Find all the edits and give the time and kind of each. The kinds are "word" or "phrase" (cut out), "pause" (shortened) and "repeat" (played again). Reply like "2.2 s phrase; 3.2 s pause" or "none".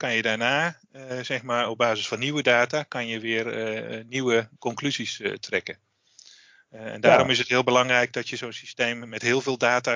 none